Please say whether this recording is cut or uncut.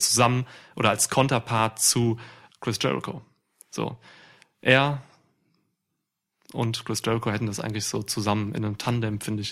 cut